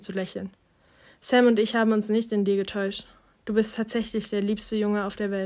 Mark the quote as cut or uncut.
uncut